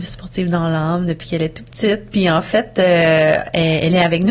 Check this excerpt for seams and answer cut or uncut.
uncut